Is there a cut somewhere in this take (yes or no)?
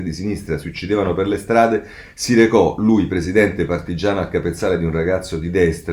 no